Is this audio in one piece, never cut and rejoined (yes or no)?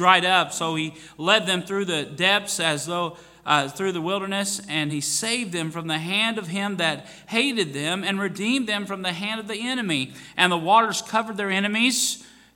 yes